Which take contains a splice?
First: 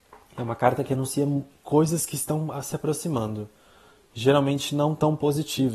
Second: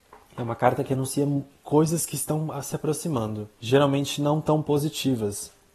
second; 1 cut; at 3.5 s

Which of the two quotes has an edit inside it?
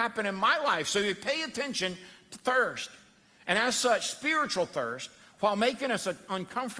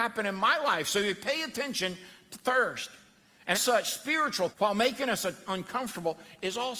second; 2 cuts; at 3.5 s, 4.5 s

